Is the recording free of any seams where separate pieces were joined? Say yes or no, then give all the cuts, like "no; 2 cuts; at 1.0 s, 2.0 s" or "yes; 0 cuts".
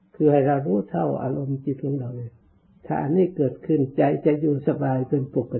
no; 1 cut; at 2.7 s